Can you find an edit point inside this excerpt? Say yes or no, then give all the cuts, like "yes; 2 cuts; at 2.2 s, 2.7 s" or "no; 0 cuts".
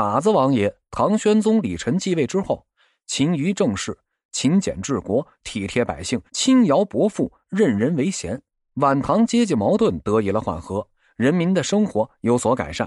yes; 2 cuts; at 6.3 s, 8.5 s